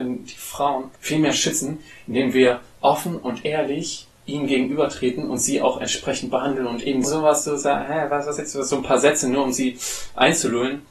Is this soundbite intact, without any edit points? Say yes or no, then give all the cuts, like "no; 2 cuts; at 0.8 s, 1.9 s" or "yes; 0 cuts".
no; 3 cuts; at 1.0 s, 4.1 s, 7.0 s